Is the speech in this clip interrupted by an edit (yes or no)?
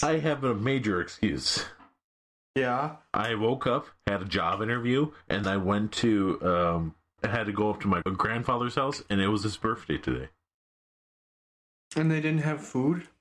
yes